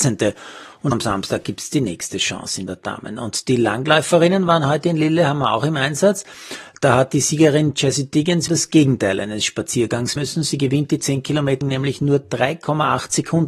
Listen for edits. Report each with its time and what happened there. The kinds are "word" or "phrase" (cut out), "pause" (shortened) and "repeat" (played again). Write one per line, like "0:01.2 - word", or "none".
0:00.9 - word
0:02.7 - phrase
0:08.5 - word
0:10.2 - word
0:11.6 - word

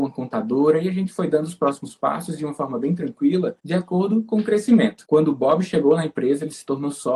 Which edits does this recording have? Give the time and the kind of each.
none

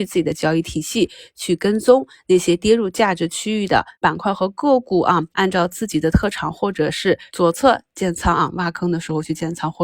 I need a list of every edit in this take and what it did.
0:03.9 - pause
0:05.3 - pause
0:07.3 - pause

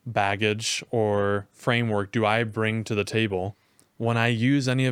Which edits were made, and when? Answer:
none

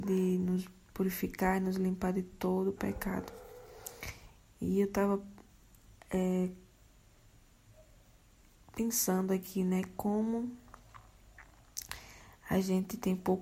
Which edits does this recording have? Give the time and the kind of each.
none

